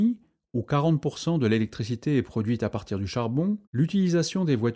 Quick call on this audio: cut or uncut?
cut